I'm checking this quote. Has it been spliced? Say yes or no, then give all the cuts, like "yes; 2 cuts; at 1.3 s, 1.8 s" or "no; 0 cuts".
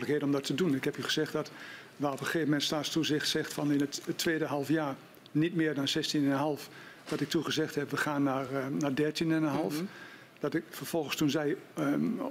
no; 0 cuts